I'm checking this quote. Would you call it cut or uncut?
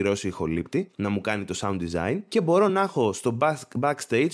uncut